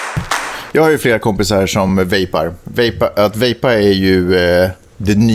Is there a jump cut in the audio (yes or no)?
no